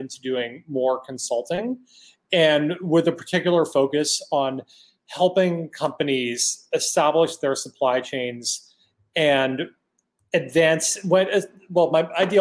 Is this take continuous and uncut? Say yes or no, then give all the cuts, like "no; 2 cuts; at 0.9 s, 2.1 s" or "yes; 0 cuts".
yes; 0 cuts